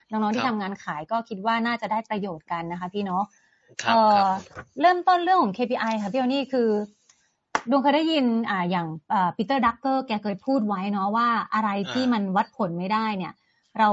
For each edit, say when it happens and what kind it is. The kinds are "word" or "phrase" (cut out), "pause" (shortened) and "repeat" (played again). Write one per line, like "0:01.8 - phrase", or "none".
none